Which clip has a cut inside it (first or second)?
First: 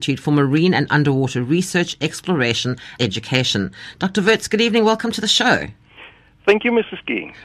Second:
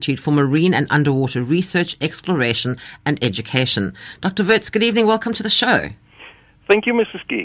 first